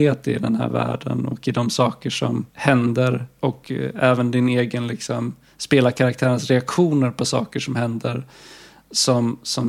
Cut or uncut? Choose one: cut